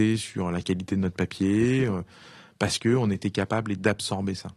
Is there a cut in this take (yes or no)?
no